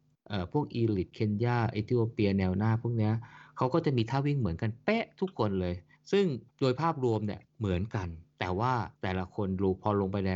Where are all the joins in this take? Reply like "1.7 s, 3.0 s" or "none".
6.0 s, 6.5 s, 7.5 s, 8.3 s, 8.9 s

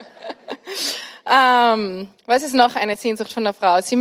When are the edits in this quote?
none

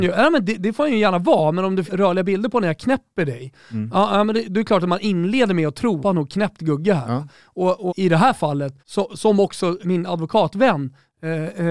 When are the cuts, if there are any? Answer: 1.9 s, 6.0 s, 7.9 s, 8.8 s, 9.8 s

